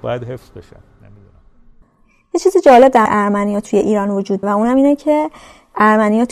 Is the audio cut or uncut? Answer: cut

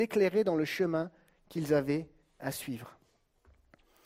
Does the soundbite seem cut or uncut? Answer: uncut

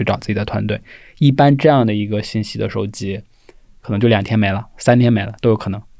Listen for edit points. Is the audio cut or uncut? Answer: uncut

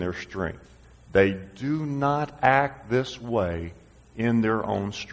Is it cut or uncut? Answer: uncut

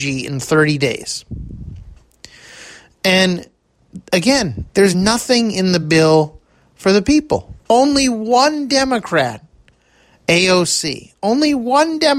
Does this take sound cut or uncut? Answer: uncut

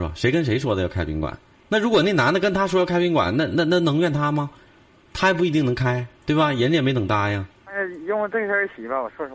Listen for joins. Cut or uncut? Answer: cut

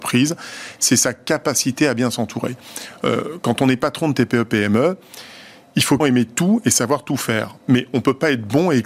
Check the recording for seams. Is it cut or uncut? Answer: cut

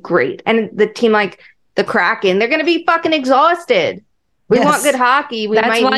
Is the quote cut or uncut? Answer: uncut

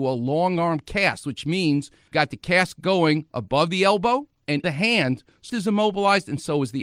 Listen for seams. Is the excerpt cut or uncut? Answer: cut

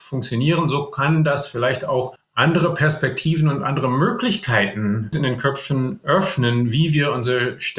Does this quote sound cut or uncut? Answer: cut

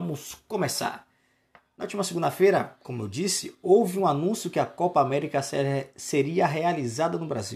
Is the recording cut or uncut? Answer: uncut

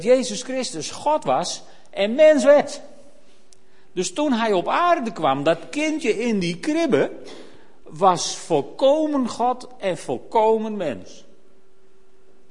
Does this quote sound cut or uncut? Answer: uncut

